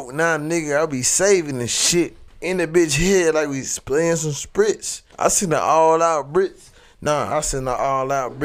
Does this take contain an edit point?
yes; 2 cuts; at 2.3 s, 5.1 s

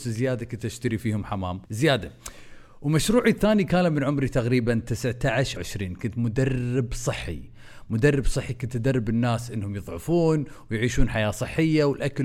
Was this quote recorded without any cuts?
no; 2 cuts; at 1.6 s, 5.6 s

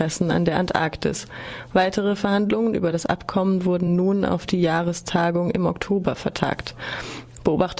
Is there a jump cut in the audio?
no; 0 cuts

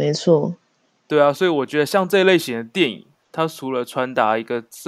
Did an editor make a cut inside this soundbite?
no; 0 cuts

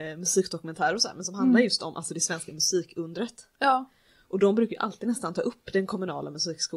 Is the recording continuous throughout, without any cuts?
yes; 0 cuts

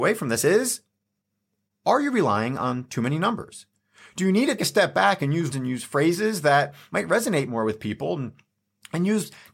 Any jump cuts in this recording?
yes; 2 cuts; at 4.6 s, 5.5 s

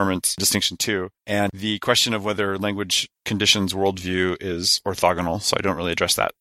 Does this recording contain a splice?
no; 0 cuts

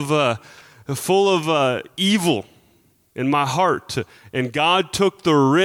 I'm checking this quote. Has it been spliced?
no; 0 cuts

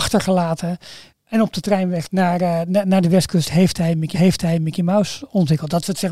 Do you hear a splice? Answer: yes; 3 cuts; at 1.1 s, 2.1 s, 4.1 s

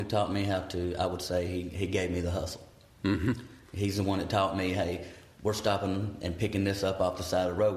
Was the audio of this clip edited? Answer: no; 0 cuts

